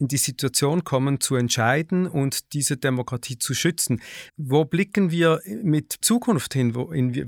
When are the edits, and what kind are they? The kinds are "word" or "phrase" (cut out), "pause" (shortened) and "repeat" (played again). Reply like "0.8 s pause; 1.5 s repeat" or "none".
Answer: 4.3 s pause; 6.0 s phrase